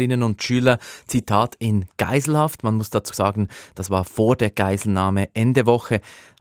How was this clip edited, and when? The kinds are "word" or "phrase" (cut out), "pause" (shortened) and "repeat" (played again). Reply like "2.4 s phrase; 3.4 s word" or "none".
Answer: 3.1 s word